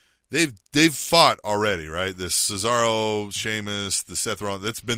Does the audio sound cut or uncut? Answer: uncut